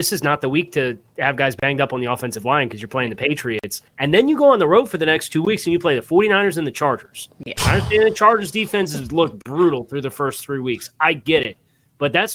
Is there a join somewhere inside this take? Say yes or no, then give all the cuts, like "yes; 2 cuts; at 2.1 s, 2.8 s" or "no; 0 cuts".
yes; 1 cut; at 3.9 s